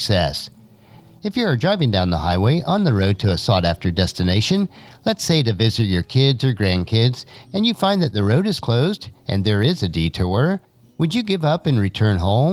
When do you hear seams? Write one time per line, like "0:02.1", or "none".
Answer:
none